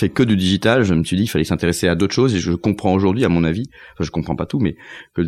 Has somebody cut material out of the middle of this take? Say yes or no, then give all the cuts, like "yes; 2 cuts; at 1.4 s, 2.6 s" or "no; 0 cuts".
no; 0 cuts